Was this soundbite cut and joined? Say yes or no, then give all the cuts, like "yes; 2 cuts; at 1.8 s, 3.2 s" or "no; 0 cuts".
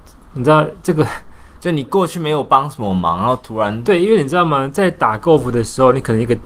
no; 0 cuts